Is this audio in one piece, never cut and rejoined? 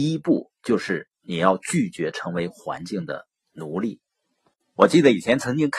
yes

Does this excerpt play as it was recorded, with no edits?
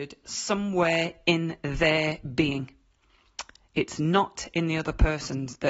yes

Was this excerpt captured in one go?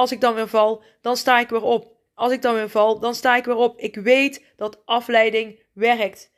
yes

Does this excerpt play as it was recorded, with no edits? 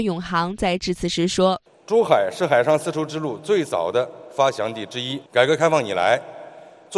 no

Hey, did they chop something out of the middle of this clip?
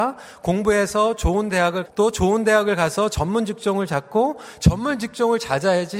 yes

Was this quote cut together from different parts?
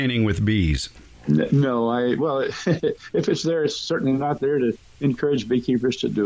no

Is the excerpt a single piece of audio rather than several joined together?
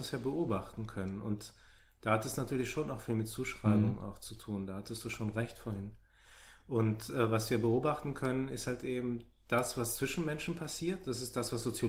yes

